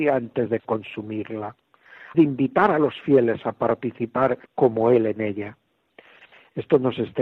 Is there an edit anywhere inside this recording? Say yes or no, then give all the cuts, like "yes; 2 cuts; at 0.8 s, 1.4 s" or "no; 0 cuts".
yes; 2 cuts; at 2.1 s, 4.5 s